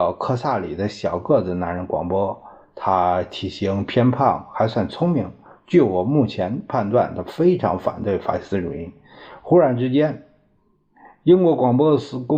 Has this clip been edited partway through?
no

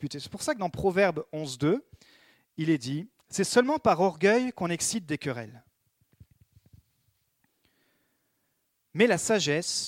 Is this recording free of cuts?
yes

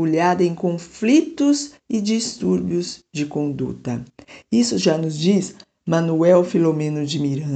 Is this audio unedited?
no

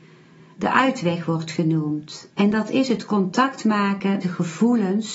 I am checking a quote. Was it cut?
yes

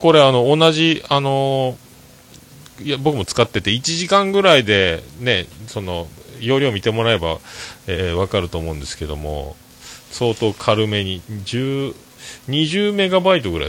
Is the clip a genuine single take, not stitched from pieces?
no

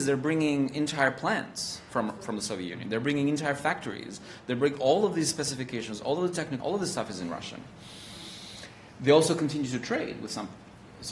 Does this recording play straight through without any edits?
no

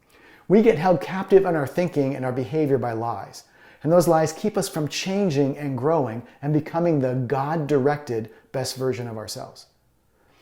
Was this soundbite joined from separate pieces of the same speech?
no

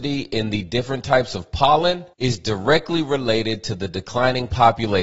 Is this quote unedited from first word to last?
no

